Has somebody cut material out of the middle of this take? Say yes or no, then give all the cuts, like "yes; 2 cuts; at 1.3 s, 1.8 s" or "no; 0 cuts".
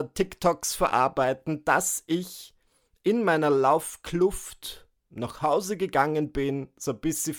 no; 0 cuts